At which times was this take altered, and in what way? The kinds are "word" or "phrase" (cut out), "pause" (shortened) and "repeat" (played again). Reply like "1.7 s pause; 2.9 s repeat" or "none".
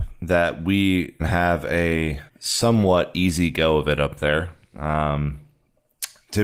1.2 s word; 2.3 s pause